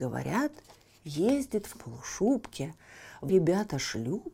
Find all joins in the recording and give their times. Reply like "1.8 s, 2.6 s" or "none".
1.7 s, 3.3 s